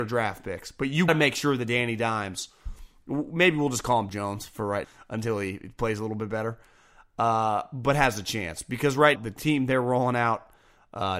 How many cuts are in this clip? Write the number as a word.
four